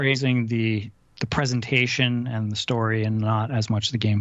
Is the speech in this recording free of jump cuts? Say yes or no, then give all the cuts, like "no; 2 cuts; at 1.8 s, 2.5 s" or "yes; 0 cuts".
yes; 0 cuts